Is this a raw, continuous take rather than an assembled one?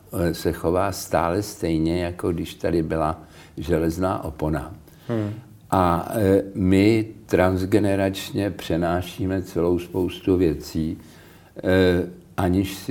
yes; 0 cuts

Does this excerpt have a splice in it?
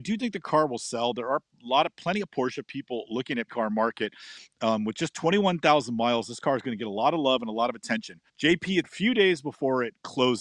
yes; 3 cuts; at 3.5 s, 8.3 s, 8.8 s

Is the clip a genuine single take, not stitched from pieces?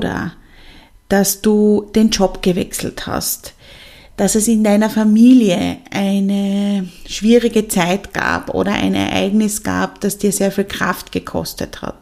yes; 0 cuts

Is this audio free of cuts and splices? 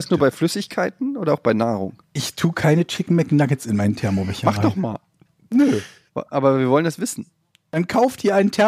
yes; 0 cuts

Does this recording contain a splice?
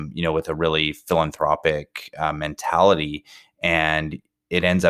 no; 0 cuts

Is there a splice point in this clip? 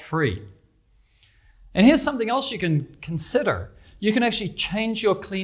no; 0 cuts

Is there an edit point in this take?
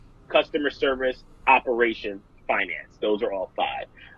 no; 0 cuts

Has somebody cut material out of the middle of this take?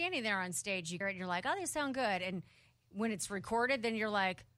yes; 1 cut; at 1.0 s

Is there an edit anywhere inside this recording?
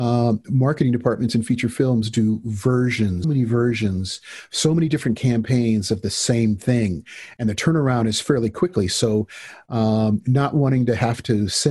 yes; 1 cut; at 3.2 s

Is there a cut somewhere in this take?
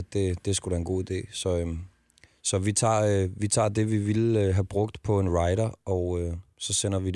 no; 0 cuts

